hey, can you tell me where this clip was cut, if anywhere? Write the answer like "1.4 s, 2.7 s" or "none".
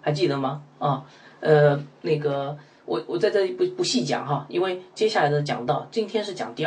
none